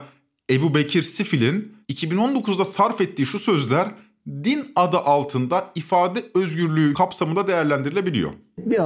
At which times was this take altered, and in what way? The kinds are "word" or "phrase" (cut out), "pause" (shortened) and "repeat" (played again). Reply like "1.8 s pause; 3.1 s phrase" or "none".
1.8 s pause